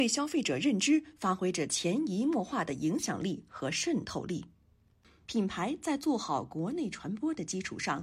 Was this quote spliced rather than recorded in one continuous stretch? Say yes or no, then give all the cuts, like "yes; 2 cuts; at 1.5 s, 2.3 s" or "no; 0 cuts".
no; 0 cuts